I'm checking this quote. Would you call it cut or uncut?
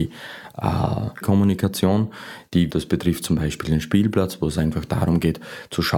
cut